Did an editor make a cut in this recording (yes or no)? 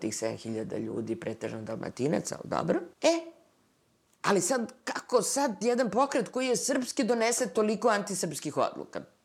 yes